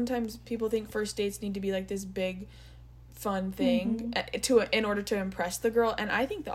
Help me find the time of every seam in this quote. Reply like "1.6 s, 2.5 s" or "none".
none